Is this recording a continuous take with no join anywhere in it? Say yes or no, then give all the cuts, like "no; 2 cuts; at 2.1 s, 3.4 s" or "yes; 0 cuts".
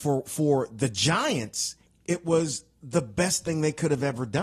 no; 1 cut; at 1.8 s